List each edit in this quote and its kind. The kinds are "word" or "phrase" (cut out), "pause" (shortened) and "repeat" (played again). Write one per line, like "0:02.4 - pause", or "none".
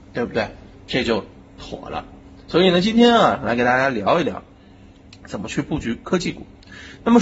none

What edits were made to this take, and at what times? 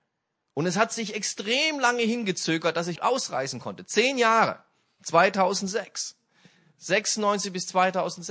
0:03.0 - word

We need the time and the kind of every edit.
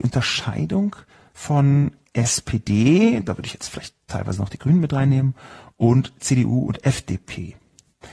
none

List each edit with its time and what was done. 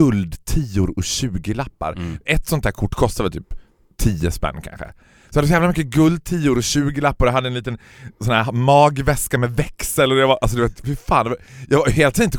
none

